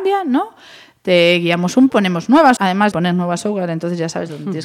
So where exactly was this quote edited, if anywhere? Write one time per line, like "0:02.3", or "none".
0:01.9
0:02.6
0:02.9